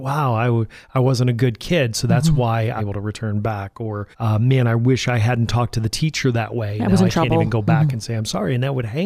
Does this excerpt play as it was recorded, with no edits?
no; 2 cuts; at 2.8 s, 4.1 s

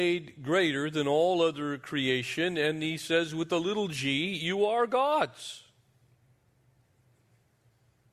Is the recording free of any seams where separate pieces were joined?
yes; 0 cuts

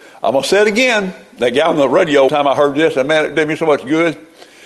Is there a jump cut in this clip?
yes; 1 cut; at 2.3 s

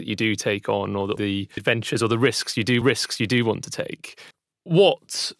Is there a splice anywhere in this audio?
yes; 4 cuts; at 1.2 s, 1.6 s, 2.8 s, 4.3 s

